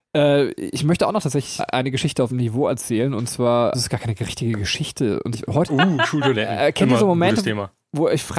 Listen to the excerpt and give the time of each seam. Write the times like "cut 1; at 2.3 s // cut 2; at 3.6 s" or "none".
cut 1; at 1.6 s // cut 2; at 2.3 s // cut 3; at 3.7 s // cut 4; at 5.3 s // cut 5; at 5.7 s